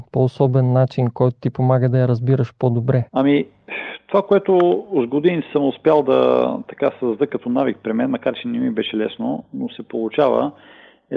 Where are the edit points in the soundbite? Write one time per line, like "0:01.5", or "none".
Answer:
0:03.1